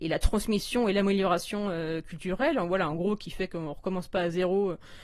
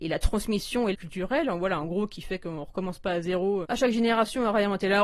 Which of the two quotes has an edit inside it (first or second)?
second